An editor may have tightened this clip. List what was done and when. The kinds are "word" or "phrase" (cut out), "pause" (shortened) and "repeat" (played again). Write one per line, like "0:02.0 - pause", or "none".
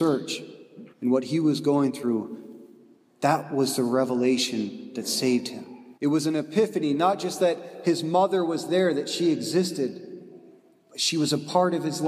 0:00.9 - pause
0:06.0 - pause